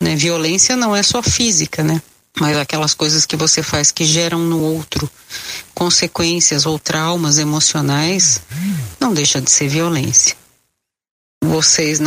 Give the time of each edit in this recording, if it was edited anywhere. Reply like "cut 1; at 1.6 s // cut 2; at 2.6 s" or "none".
none